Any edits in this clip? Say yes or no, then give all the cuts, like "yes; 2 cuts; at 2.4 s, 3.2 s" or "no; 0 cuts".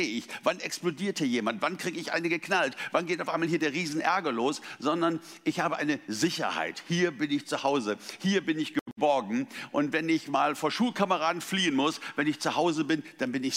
no; 0 cuts